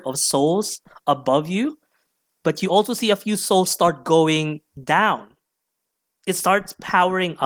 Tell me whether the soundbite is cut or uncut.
uncut